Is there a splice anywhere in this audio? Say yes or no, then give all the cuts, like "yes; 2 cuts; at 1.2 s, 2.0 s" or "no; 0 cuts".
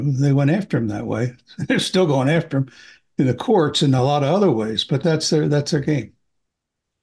no; 0 cuts